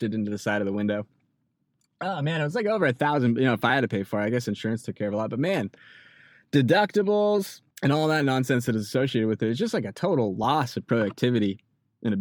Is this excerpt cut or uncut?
cut